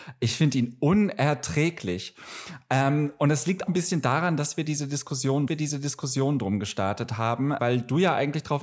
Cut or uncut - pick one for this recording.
cut